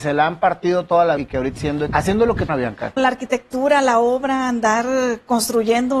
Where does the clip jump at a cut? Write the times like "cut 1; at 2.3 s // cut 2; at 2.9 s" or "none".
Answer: cut 1; at 1.2 s // cut 2; at 1.5 s // cut 3; at 1.9 s // cut 4; at 2.5 s // cut 5; at 3.0 s